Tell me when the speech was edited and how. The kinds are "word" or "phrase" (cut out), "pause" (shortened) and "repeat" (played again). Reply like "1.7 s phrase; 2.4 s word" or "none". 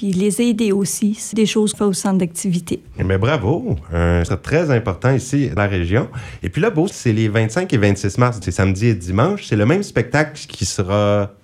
1.3 s word; 1.7 s word; 4.3 s word; 5.6 s word; 6.9 s word; 8.4 s word